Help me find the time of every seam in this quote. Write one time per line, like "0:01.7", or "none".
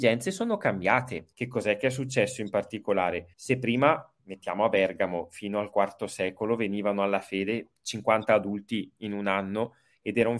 0:01.3
0:03.3
0:04.2

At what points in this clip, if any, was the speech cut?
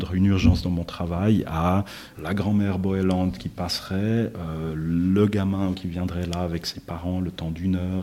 0:02.1
0:05.7

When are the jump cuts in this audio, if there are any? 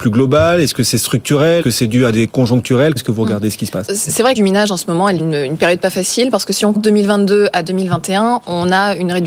0:01.6
0:02.3
0:03.0
0:03.9
0:04.3
0:05.2
0:06.7

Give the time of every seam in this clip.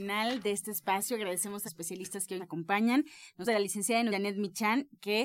0:01.7
0:02.4
0:03.4
0:04.1

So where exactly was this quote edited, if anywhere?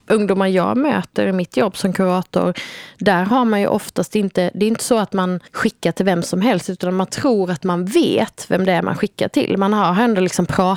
0:05.5

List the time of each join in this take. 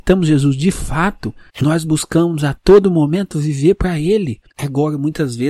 0:01.5
0:04.5

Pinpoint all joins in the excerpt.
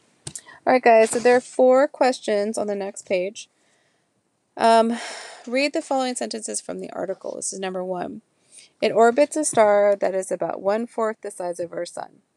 none

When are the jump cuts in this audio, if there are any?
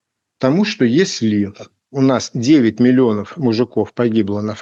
none

